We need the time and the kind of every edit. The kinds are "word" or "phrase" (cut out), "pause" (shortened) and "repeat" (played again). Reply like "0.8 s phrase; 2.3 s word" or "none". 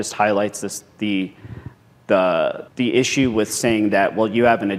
2.7 s pause